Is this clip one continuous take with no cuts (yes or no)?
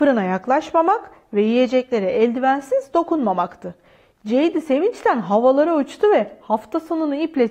yes